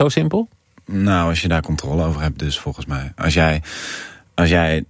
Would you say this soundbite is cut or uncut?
uncut